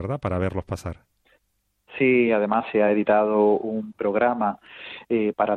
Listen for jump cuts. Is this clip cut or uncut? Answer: uncut